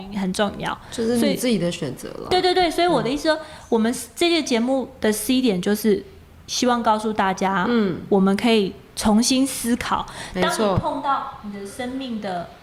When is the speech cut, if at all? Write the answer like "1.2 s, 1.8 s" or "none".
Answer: none